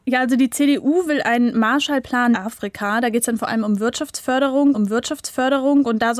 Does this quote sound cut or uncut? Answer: cut